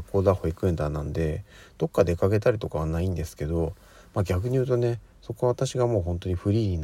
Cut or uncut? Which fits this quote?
uncut